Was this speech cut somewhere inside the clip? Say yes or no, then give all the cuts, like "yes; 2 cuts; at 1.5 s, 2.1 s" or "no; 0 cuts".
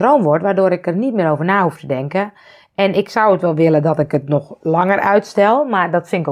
no; 0 cuts